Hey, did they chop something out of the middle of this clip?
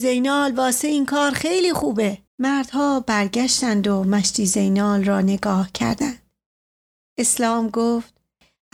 yes; 1 cut; at 2.3 s

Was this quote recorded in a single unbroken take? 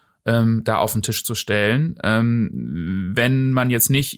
yes; 0 cuts

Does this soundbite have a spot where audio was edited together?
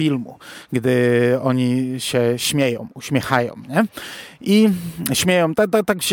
no; 0 cuts

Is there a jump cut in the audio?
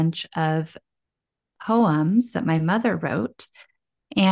no; 0 cuts

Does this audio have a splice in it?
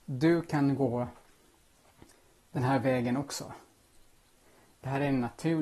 no; 0 cuts

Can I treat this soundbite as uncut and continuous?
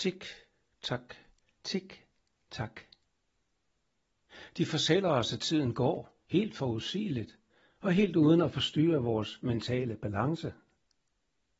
yes; 0 cuts

